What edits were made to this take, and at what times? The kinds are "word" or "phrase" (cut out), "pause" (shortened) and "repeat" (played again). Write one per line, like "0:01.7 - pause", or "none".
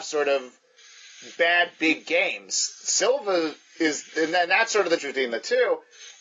0:05.0 - word